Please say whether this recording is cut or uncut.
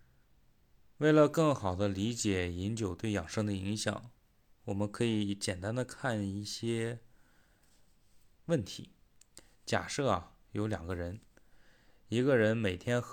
uncut